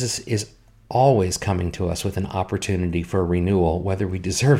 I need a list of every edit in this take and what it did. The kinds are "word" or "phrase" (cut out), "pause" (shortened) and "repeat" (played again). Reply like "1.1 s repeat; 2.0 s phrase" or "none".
none